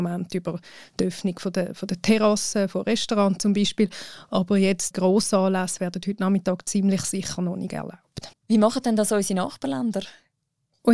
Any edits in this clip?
yes; 2 cuts; at 4.9 s, 8.3 s

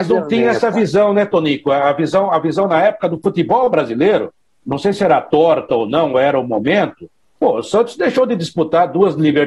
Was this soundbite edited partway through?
no; 0 cuts

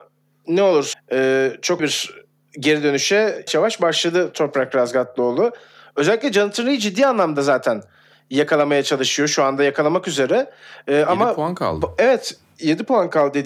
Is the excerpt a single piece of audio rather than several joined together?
no; 3 cuts; at 0.9 s, 1.8 s, 3.5 s

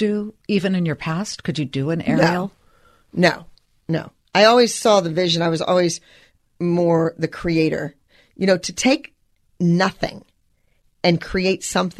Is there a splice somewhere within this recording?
no; 0 cuts

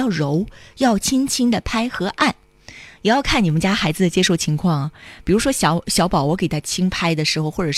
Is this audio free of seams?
yes; 0 cuts

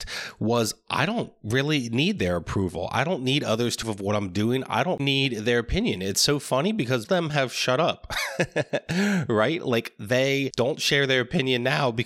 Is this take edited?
yes; 3 cuts; at 3.8 s, 5.0 s, 7.0 s

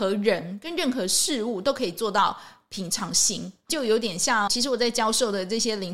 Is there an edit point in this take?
yes; 1 cut; at 4.5 s

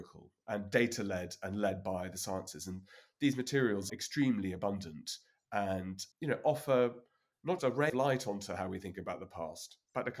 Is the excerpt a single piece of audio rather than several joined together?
no; 4 cuts; at 3.9 s, 6.1 s, 7.6 s, 7.9 s

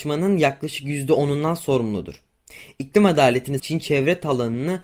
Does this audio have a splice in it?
yes; 1 cut; at 3.6 s

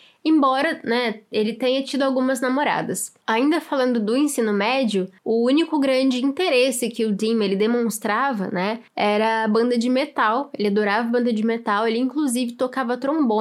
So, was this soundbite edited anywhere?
yes; 3 cuts; at 3.2 s, 5.2 s, 8.9 s

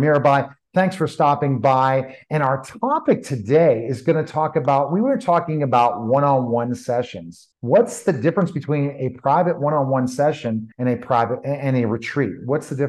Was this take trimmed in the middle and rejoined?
yes; 2 cuts; at 7.5 s, 10.7 s

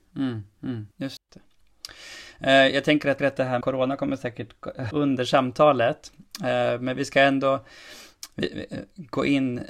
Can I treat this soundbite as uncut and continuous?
no; 4 cuts; at 0.9 s, 3.2 s, 3.6 s, 4.9 s

